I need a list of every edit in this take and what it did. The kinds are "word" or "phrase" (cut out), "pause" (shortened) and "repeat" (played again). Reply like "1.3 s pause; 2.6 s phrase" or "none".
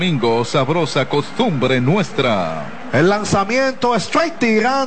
none